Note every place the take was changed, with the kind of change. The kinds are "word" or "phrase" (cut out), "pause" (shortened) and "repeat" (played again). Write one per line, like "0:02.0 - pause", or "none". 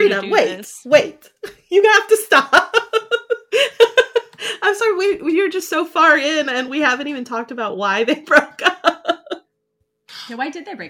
none